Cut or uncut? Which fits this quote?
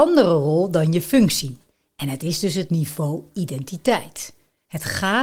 uncut